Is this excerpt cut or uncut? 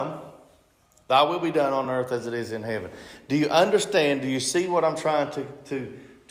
uncut